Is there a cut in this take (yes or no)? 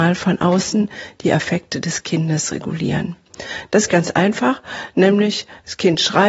yes